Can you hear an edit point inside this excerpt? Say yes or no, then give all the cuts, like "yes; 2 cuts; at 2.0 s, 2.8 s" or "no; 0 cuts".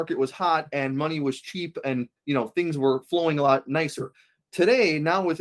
no; 0 cuts